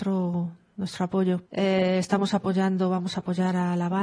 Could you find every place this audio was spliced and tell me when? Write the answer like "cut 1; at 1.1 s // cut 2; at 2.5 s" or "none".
cut 1; at 1.5 s